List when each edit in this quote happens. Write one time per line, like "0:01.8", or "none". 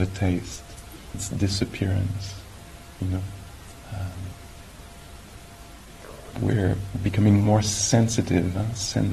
0:01.1
0:06.3
0:07.5